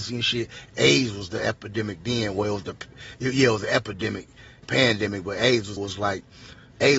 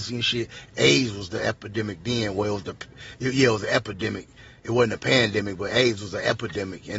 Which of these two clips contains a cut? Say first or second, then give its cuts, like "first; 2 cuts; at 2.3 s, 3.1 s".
first; 2 cuts; at 4.6 s, 5.8 s